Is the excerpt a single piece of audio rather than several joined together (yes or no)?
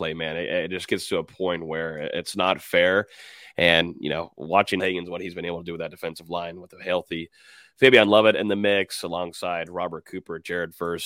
no